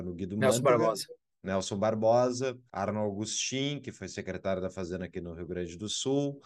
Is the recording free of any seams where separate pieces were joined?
no; 1 cut; at 2.7 s

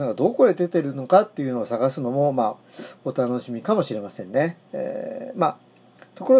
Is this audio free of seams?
no; 1 cut; at 4.7 s

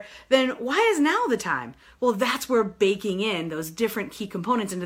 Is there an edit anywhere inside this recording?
no; 0 cuts

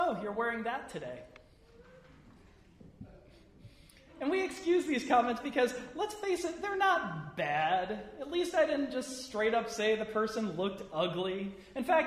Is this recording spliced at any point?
no; 0 cuts

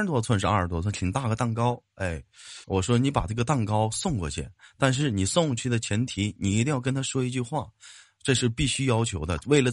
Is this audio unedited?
no; 1 cut; at 2.6 s

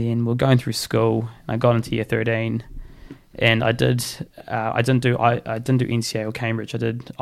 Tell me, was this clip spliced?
no; 0 cuts

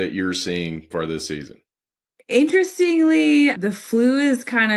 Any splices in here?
yes; 2 cuts; at 0.9 s, 3.5 s

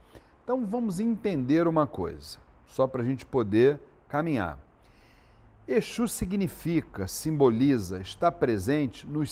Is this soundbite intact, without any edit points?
yes; 0 cuts

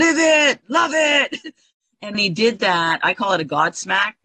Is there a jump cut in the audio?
yes; 1 cut; at 2.1 s

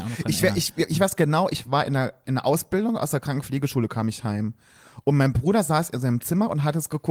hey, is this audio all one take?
yes; 0 cuts

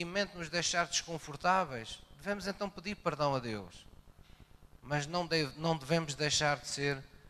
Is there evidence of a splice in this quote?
no; 0 cuts

